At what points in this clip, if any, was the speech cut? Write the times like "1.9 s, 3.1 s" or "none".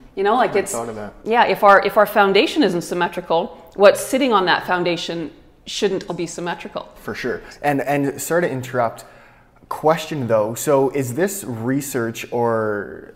6.1 s